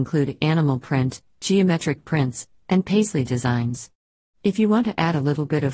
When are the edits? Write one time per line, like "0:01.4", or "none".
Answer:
none